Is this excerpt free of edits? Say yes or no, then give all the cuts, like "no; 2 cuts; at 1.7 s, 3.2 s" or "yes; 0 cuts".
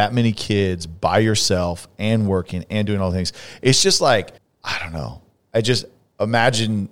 no; 1 cut; at 4.4 s